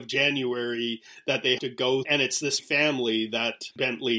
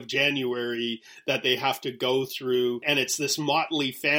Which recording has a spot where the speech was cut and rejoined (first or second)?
first